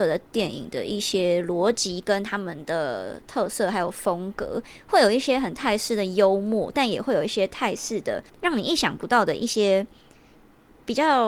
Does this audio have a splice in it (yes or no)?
yes